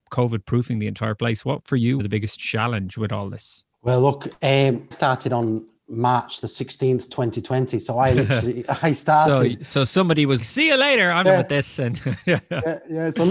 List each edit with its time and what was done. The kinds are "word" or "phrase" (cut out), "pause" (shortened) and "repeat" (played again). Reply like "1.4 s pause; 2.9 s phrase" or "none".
2.0 s phrase; 3.7 s pause; 4.9 s word; 5.8 s pause; 10.4 s word; 11.2 s phrase